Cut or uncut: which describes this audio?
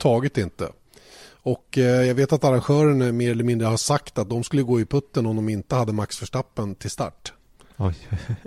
uncut